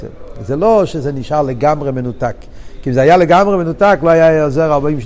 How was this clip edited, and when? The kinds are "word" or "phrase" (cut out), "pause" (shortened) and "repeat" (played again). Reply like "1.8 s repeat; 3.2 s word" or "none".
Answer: none